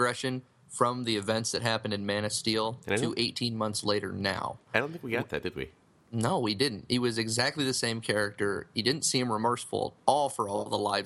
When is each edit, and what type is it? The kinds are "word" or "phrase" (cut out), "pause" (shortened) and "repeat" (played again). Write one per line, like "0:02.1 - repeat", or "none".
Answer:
none

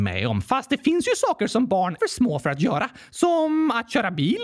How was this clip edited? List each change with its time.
0:02.0 - word

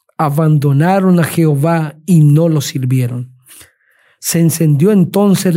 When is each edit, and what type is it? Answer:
none

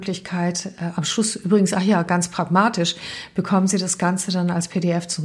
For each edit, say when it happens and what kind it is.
none

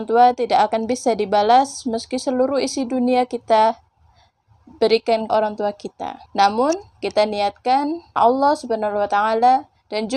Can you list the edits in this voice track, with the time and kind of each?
0:05.3 - word
0:06.3 - pause
0:08.2 - word

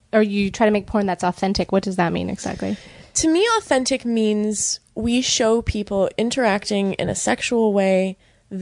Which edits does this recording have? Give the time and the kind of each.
none

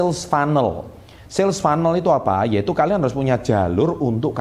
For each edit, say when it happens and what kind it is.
none

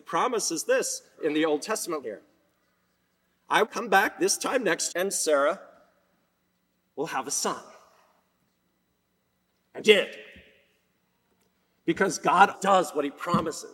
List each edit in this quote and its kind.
0:01.2 - word
0:02.0 - word
0:03.6 - word
0:04.9 - word
0:09.8 - word
0:12.5 - word

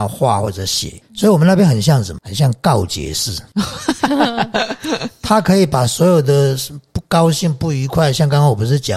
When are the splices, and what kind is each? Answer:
none

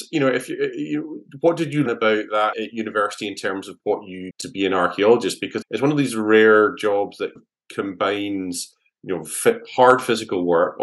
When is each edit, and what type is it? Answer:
0:01.9 - word
0:02.5 - word
0:03.8 - word
0:04.3 - word
0:05.6 - word
0:07.4 - word

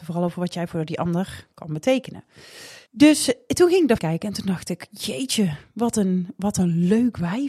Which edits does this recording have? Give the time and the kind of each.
0:02.9 - pause
0:04.0 - word

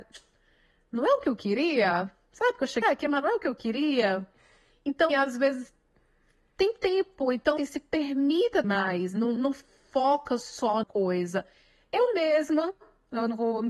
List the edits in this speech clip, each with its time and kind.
0:02.8 - word
0:05.1 - word
0:07.6 - word
0:08.6 - word
0:09.4 - word
0:10.8 - word

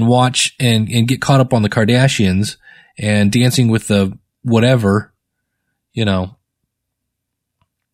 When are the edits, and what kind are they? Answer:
none

